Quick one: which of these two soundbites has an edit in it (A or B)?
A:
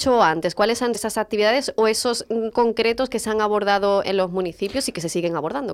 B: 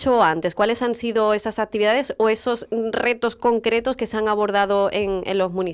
A